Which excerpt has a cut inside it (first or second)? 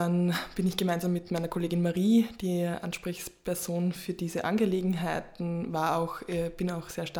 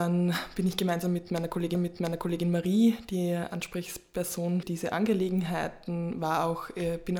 second